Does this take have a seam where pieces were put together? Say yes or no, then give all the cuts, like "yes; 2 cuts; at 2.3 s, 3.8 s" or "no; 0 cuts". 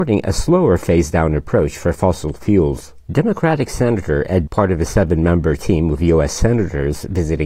yes; 2 cuts; at 3.0 s, 4.5 s